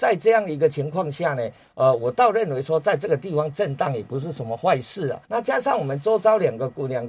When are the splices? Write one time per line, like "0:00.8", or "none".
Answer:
0:05.2